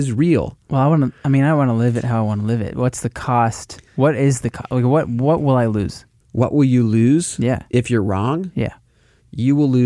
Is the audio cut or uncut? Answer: cut